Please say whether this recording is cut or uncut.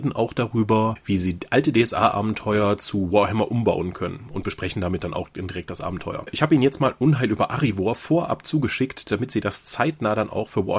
uncut